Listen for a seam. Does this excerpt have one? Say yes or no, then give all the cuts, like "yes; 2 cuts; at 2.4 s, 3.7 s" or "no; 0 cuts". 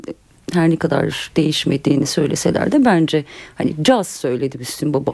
no; 0 cuts